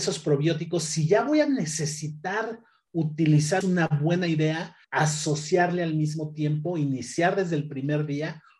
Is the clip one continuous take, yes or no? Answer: no